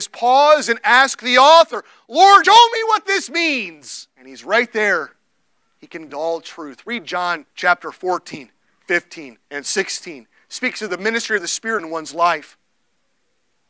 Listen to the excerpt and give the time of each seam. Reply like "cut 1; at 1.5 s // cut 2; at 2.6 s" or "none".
cut 1; at 2.4 s // cut 2; at 4.2 s // cut 3; at 5.6 s // cut 4; at 6.1 s // cut 5; at 7.5 s // cut 6; at 9.4 s // cut 7; at 11.8 s